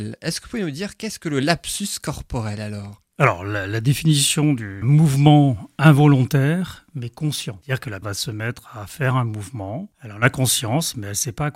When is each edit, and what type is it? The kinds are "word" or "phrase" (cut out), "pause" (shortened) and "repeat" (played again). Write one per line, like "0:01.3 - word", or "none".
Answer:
0:04.8 - phrase
0:08.0 - word